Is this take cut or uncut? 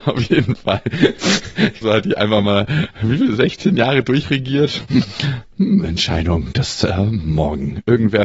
cut